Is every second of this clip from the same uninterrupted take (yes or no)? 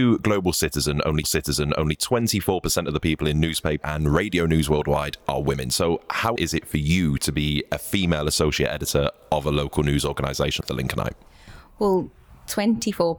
no